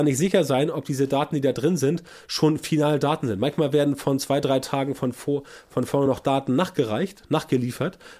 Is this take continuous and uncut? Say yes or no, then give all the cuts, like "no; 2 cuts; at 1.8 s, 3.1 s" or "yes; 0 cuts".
yes; 0 cuts